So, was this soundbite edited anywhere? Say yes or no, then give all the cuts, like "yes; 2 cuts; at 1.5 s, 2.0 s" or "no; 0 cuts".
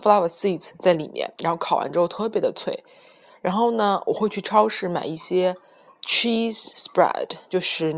no; 0 cuts